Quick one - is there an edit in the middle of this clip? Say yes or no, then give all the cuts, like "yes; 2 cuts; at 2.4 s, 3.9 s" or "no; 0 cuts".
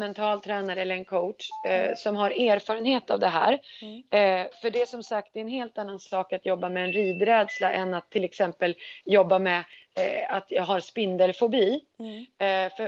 no; 0 cuts